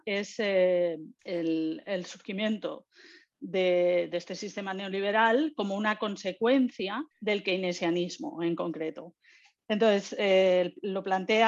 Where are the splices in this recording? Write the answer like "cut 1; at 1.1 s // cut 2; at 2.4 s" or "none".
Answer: cut 1; at 1.2 s // cut 2; at 7.1 s